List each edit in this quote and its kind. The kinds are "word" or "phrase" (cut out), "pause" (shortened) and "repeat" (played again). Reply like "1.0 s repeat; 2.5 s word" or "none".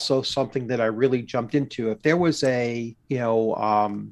3.0 s pause